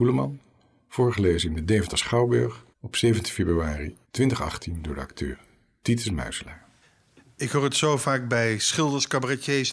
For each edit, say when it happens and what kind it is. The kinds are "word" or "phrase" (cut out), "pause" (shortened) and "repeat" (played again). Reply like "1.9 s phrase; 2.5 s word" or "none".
2.7 s pause; 4.0 s pause; 6.8 s pause